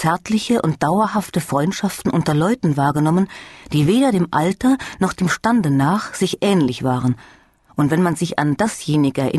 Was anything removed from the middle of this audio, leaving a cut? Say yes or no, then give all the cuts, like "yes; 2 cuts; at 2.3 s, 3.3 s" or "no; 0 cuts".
no; 0 cuts